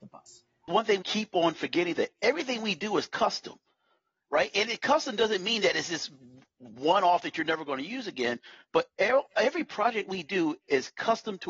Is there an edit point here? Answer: yes; 1 cut; at 1.0 s

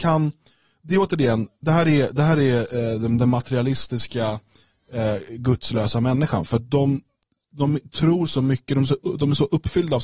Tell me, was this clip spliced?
no; 0 cuts

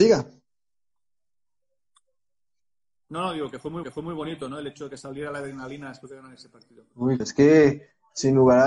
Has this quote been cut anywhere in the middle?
yes; 2 cuts; at 3.8 s, 7.2 s

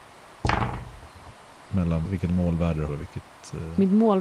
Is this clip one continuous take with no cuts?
no; 2 cuts; at 2.0 s, 2.9 s

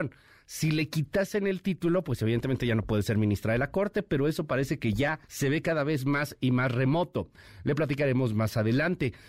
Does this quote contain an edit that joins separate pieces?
yes; 1 cut; at 5.2 s

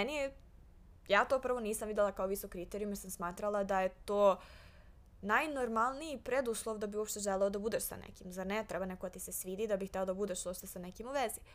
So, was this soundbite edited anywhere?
no; 0 cuts

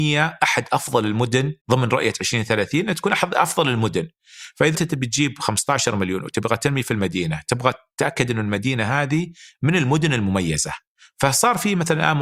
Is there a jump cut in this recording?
yes; 2 cuts; at 1.6 s, 4.7 s

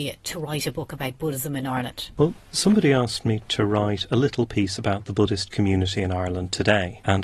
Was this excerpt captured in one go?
yes; 0 cuts

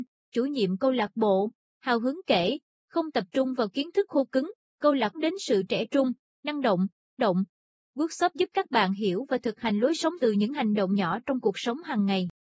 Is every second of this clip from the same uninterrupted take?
no; 3 cuts; at 5.1 s, 7.2 s, 10.2 s

